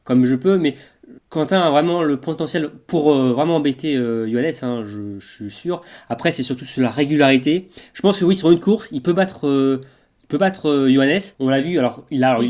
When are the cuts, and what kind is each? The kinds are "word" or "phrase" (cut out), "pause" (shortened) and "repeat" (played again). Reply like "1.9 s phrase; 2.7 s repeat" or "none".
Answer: 1.2 s pause; 11.3 s pause